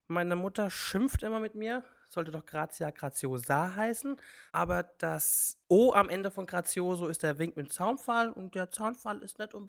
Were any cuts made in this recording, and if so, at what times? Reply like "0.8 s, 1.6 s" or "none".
4.5 s, 5.6 s

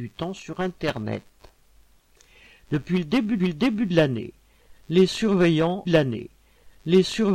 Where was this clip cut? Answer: 3.4 s, 5.9 s

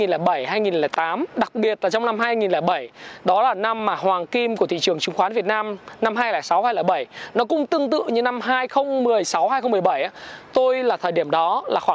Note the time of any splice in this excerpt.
none

